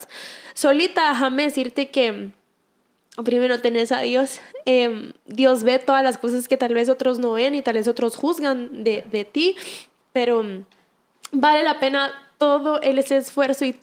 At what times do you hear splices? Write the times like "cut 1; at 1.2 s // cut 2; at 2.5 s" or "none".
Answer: none